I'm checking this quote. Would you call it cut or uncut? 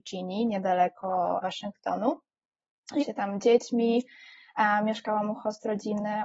cut